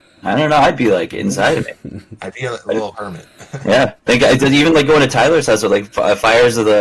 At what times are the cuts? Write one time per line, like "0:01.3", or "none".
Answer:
0:04.0